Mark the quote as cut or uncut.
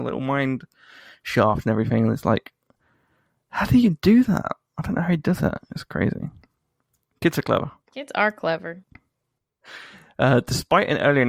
uncut